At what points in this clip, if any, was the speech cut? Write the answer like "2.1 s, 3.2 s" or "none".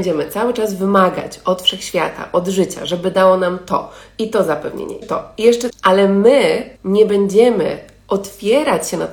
5.0 s, 5.7 s, 6.8 s